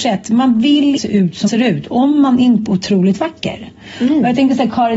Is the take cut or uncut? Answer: cut